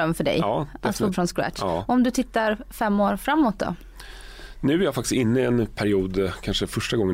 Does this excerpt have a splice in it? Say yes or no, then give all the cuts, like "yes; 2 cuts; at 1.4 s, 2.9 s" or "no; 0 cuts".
yes; 1 cut; at 1.1 s